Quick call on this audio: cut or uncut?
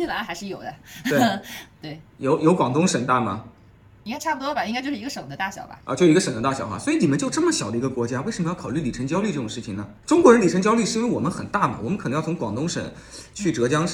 uncut